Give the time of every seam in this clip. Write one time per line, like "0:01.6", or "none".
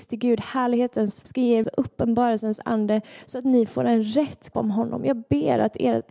0:01.2
0:01.6
0:04.5

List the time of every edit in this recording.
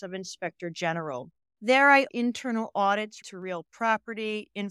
0:01.4
0:02.1
0:03.2

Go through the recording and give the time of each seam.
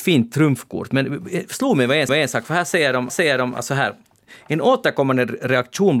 0:02.1
0:03.1

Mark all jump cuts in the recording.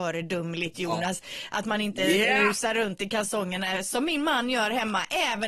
none

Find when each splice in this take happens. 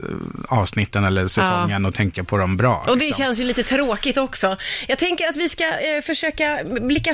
none

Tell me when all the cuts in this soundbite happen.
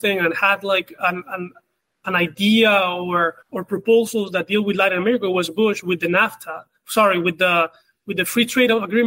0:03.4

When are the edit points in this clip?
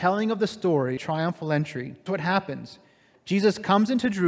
0:01.0
0:02.1

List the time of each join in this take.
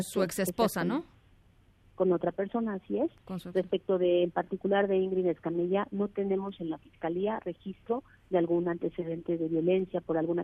none

